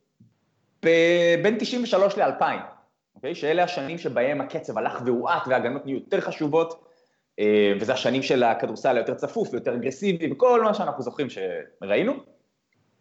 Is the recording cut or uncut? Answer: uncut